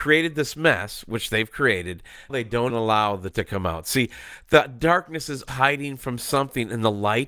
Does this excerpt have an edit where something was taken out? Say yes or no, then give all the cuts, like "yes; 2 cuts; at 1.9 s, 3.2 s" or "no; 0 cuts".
yes; 4 cuts; at 2.3 s, 2.7 s, 3.3 s, 5.5 s